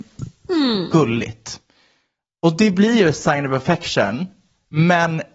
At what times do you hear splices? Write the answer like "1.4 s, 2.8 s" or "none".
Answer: none